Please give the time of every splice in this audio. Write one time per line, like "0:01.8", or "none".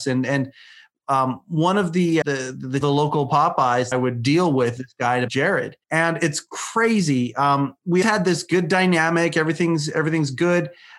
0:02.2
0:02.8
0:03.9
0:04.8
0:05.3
0:05.8
0:08.0